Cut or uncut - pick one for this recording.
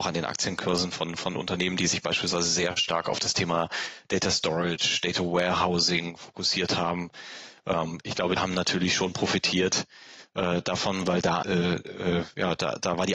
cut